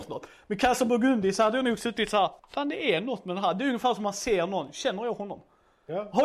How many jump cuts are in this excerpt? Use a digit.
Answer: 1